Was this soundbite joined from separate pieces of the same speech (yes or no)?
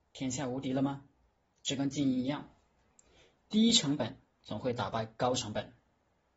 no